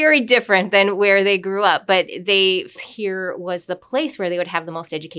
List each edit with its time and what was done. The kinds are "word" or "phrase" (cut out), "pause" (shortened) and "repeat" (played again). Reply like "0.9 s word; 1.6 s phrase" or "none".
2.7 s word